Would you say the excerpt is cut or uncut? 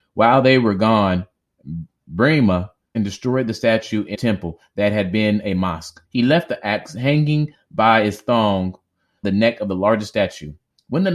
cut